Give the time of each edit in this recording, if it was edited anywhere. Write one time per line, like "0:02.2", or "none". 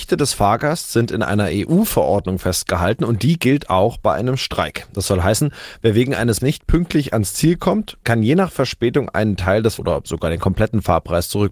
0:06.4
0:09.8